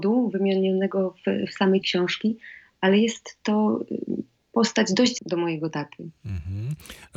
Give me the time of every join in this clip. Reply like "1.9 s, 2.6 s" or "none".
1.8 s, 4.4 s, 5.2 s